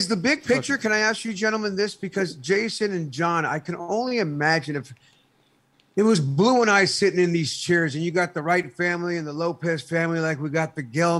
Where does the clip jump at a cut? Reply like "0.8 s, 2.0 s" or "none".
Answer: none

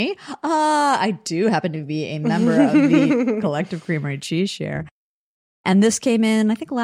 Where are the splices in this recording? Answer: none

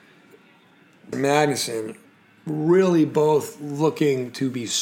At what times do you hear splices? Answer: 1.1 s

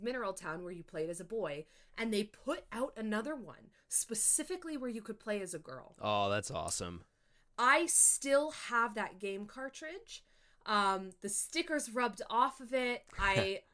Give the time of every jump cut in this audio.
none

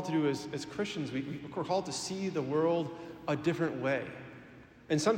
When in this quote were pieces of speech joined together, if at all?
none

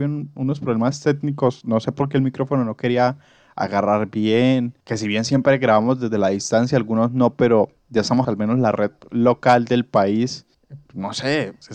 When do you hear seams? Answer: 4.8 s, 7.8 s, 8.2 s

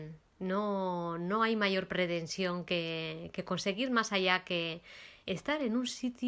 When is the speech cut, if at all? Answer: 5.2 s

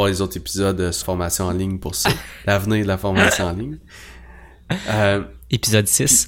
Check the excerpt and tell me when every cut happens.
1.0 s

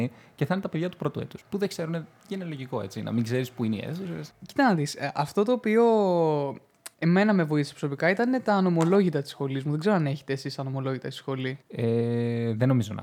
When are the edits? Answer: 1.4 s, 6.9 s, 11.6 s

